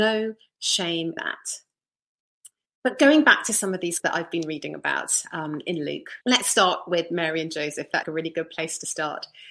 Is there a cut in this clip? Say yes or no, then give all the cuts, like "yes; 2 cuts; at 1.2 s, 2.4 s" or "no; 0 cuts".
yes; 5 cuts; at 1.2 s, 2.7 s, 4.0 s, 6.2 s, 8.0 s